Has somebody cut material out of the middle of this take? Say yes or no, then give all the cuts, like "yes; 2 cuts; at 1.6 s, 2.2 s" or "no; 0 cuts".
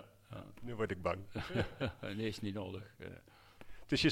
no; 0 cuts